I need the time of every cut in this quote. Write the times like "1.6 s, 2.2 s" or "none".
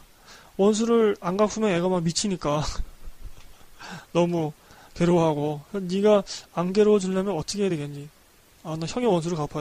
none

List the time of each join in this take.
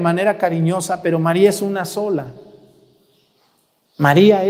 none

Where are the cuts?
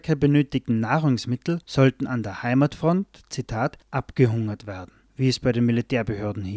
1.6 s, 3.8 s, 5.1 s

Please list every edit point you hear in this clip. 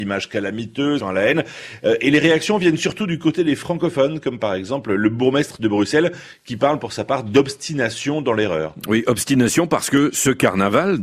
1.0 s

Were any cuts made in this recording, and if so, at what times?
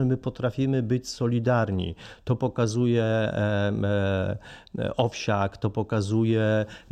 none

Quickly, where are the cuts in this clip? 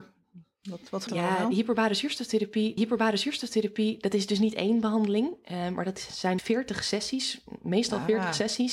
1.1 s, 2.8 s, 6.4 s

